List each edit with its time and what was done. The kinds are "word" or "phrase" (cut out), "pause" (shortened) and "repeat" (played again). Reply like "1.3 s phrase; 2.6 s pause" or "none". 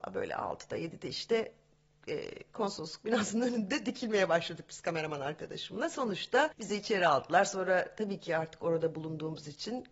none

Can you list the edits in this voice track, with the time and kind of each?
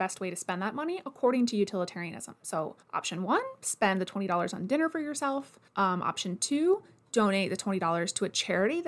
2.8 s pause; 5.7 s pause

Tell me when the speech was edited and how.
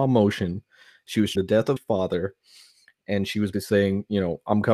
1.4 s word; 1.8 s word; 3.5 s word

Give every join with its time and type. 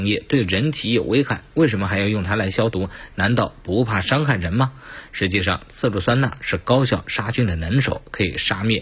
none

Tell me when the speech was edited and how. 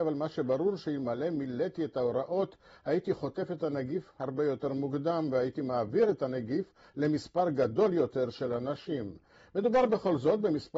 none

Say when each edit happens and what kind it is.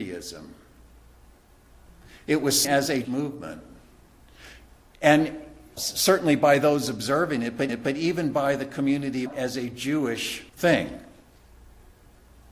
2.6 s word; 3.0 s word; 5.8 s phrase; 7.7 s repeat; 9.3 s phrase; 10.5 s pause

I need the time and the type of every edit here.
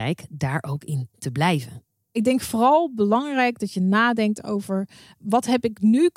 none

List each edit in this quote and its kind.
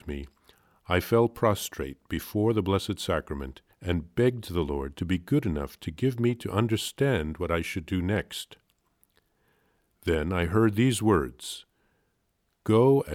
3.7 s pause

